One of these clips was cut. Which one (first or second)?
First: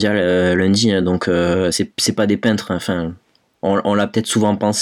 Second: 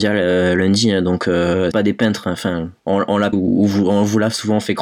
second